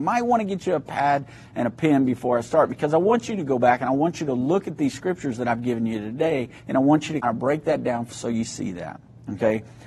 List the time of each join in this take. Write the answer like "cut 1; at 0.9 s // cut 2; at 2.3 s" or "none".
cut 1; at 6.6 s // cut 2; at 7.2 s // cut 3; at 8.1 s